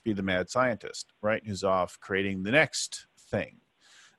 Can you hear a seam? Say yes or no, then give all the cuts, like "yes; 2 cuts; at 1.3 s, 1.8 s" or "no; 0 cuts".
no; 0 cuts